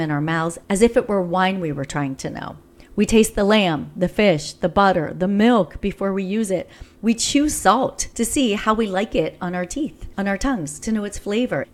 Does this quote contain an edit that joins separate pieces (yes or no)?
no